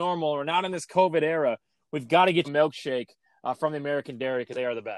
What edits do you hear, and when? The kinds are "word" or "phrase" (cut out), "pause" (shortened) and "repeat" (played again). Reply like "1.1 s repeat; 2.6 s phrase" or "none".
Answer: 2.4 s word

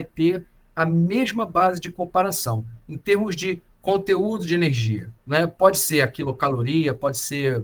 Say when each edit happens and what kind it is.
5.2 s pause

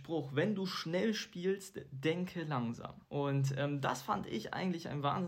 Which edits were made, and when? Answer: 3.0 s pause

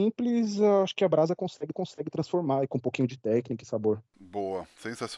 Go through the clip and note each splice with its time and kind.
1.7 s repeat

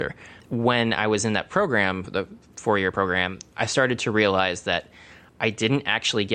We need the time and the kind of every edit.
none

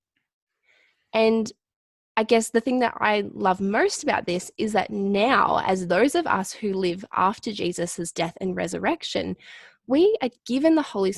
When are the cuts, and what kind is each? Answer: none

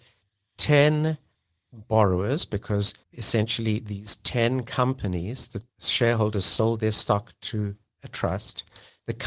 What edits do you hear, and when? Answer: 3.0 s pause; 5.7 s pause

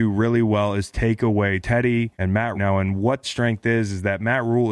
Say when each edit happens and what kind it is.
1.6 s word; 2.1 s pause; 2.5 s phrase; 3.2 s word

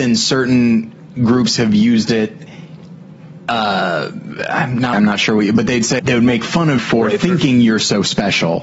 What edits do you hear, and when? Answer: 4.9 s word; 6.0 s word; 6.8 s word

